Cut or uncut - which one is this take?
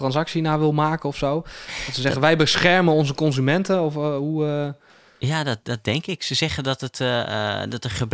uncut